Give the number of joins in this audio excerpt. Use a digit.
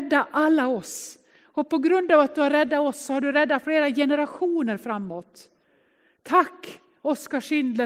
0